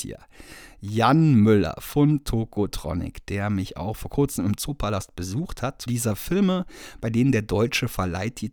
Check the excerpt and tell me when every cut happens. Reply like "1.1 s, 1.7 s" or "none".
5.9 s